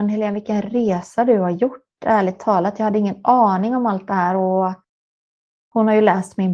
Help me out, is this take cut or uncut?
uncut